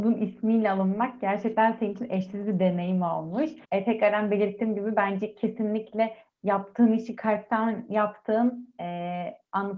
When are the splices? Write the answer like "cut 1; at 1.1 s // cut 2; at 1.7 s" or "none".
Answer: cut 1; at 3.6 s